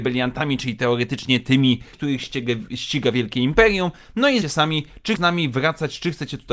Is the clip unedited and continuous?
no; 3 cuts; at 1.9 s, 4.4 s, 5.2 s

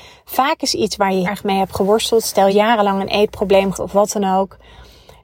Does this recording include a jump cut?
yes; 3 cuts; at 1.2 s, 2.5 s, 3.7 s

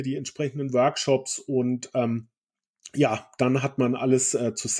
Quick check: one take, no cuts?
yes; 0 cuts

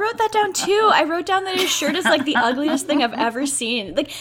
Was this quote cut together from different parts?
no; 0 cuts

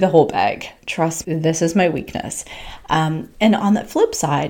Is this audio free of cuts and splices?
no; 1 cut; at 1.2 s

